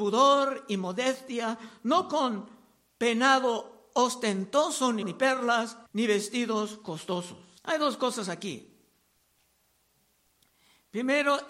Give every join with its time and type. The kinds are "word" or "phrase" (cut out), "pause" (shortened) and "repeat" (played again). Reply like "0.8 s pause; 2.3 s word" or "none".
5.0 s word; 5.9 s pause; 7.6 s pause